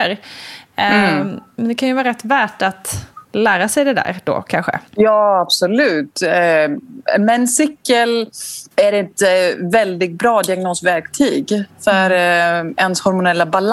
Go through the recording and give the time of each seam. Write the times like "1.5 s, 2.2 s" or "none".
3.2 s, 4.9 s, 8.7 s